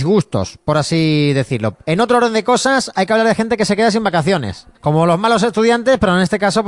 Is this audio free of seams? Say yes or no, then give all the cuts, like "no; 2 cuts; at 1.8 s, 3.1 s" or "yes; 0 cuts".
no; 1 cut; at 4.7 s